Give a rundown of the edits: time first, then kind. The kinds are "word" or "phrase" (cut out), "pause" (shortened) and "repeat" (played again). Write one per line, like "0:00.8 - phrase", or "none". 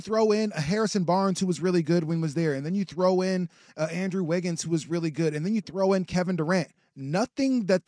none